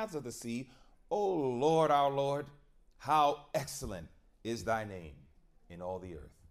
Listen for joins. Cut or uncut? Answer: uncut